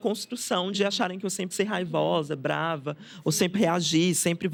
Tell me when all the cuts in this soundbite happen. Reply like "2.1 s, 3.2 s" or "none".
1.5 s, 3.5 s